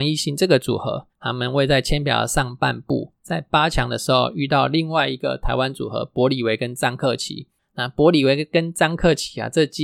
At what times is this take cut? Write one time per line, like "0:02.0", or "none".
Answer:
0:01.1